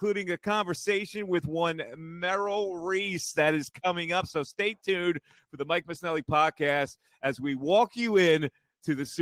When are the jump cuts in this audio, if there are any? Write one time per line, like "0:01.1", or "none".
none